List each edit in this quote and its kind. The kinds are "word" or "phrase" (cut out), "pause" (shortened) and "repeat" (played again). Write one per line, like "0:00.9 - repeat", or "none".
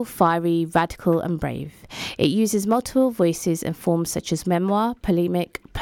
none